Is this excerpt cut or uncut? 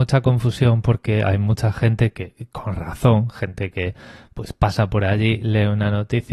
uncut